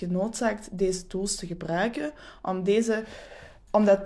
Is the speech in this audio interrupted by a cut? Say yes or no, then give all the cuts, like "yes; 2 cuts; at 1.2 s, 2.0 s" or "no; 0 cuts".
no; 0 cuts